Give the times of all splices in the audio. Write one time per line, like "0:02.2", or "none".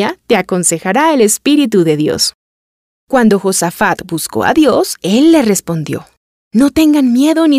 none

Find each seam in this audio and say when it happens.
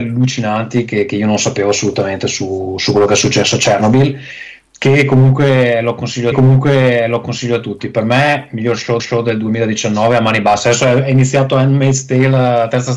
0:06.3
0:09.0

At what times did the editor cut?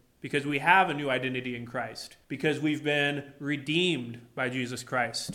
0:02.2

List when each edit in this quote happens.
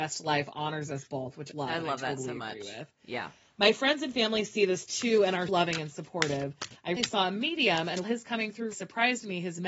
0:01.5
0:05.5
0:07.0
0:08.0
0:08.7

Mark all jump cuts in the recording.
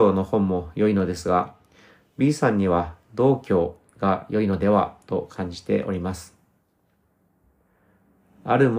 none

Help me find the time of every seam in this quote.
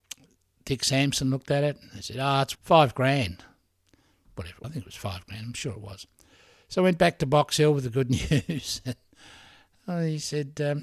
0:02.5
0:04.6

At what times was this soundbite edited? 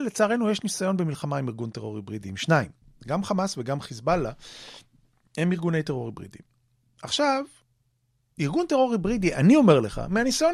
none

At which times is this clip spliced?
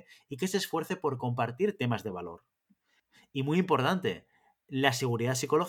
none

